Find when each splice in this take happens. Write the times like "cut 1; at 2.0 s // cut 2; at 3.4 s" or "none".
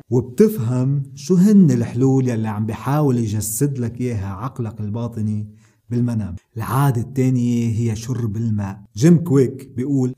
none